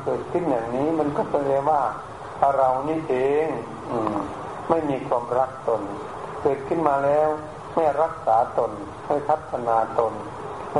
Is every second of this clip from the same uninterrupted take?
yes; 0 cuts

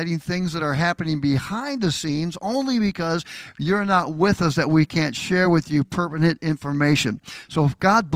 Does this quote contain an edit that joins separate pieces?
no; 0 cuts

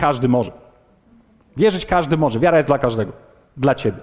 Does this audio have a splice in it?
no; 0 cuts

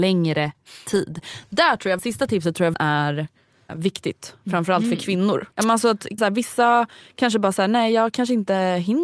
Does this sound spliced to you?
yes; 5 cuts; at 2.0 s, 2.7 s, 3.7 s, 5.5 s, 6.2 s

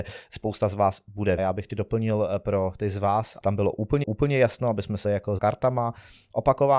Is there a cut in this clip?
yes; 6 cuts; at 1.4 s, 1.7 s, 3.4 s, 4.0 s, 5.0 s, 5.4 s

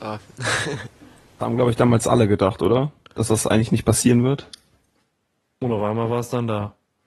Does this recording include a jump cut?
no; 0 cuts

